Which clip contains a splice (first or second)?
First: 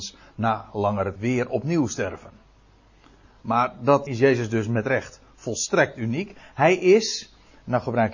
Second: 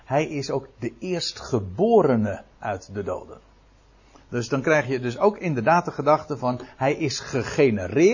first